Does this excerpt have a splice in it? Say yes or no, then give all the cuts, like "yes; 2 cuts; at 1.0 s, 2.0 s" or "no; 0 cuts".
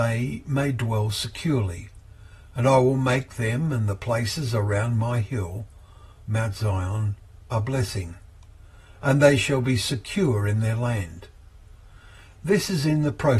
no; 0 cuts